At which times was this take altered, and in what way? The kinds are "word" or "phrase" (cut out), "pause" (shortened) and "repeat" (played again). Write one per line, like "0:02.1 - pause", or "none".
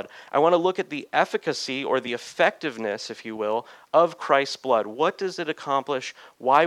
none